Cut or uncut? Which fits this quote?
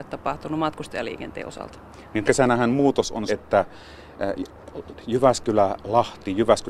cut